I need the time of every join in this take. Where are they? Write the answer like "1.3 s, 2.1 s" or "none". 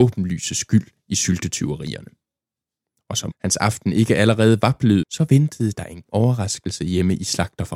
3.3 s, 5.0 s, 6.1 s